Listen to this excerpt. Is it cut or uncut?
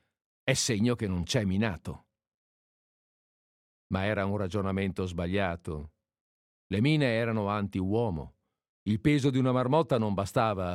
uncut